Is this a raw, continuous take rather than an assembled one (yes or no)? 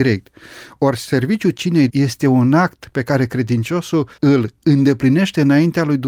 no